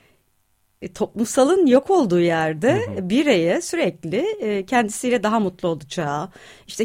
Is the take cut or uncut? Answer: uncut